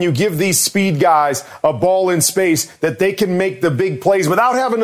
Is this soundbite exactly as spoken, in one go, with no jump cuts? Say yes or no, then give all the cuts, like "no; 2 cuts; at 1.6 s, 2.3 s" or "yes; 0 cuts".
yes; 0 cuts